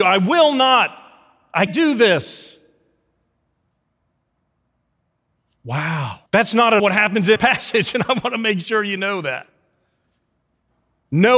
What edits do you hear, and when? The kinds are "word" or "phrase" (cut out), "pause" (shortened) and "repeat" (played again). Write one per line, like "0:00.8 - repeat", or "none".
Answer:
0:01.7 - word
0:06.3 - pause
0:06.8 - word
0:07.4 - word